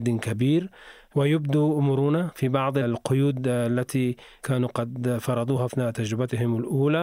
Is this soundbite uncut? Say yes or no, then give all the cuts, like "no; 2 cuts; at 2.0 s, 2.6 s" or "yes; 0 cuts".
yes; 0 cuts